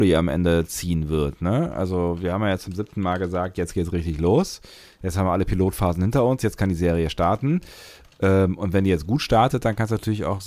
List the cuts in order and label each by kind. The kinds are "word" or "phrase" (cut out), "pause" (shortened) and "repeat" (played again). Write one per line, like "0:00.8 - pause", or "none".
none